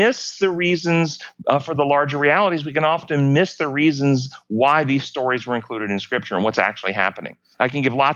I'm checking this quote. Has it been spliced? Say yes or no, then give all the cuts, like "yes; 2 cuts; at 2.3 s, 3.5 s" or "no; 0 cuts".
no; 0 cuts